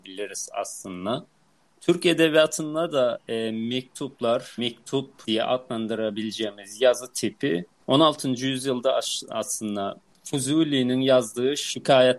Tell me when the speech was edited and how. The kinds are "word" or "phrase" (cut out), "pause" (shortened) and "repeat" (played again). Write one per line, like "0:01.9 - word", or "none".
none